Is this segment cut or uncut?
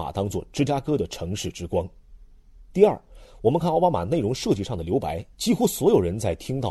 cut